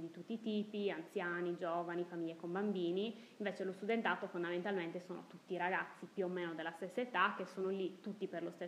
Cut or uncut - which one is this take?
uncut